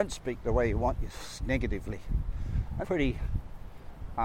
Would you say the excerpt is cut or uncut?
cut